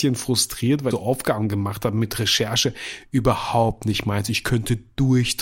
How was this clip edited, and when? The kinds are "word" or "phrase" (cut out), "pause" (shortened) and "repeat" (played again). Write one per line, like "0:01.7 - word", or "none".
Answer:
0:00.9 - word